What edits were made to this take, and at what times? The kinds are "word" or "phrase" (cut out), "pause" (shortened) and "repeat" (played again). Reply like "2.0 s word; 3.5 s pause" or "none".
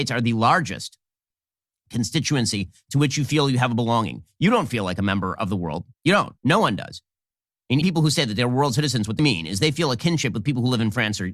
5.9 s pause; 6.4 s pause; 7.8 s word; 9.2 s word